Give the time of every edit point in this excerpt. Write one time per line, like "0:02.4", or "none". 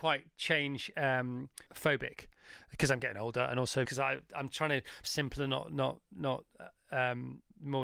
0:01.7
0:03.9
0:05.0